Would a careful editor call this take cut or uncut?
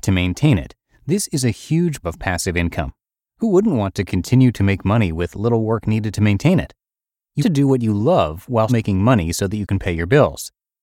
cut